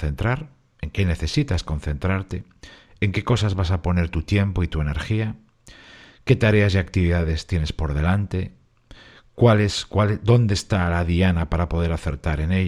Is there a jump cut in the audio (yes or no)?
no